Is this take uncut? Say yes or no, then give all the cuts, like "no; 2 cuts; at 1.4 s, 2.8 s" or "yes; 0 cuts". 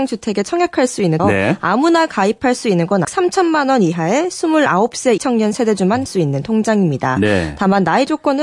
no; 4 cuts; at 1.2 s, 3.0 s, 5.2 s, 6.1 s